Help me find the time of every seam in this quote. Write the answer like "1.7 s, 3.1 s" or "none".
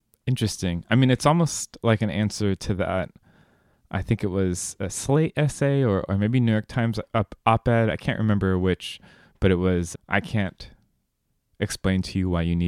9.9 s